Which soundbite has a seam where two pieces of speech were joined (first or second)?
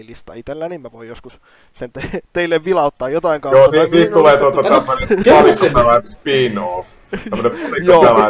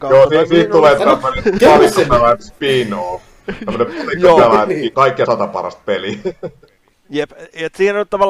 second